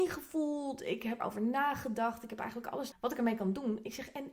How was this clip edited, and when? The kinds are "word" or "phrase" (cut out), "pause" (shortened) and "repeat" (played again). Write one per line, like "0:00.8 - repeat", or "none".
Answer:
0:01.2 - word
0:02.9 - phrase